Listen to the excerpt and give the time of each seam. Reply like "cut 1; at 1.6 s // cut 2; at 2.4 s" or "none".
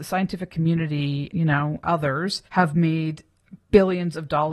cut 1; at 1.3 s // cut 2; at 2.5 s